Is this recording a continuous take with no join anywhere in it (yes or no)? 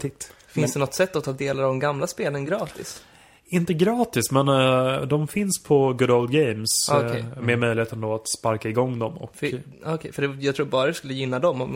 yes